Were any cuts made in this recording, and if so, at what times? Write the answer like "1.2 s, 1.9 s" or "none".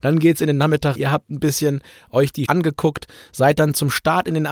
1.0 s, 2.5 s